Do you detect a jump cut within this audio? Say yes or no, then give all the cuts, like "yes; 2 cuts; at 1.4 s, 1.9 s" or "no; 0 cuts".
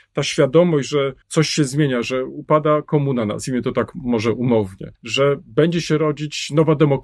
yes; 2 cuts; at 1.2 s, 4.9 s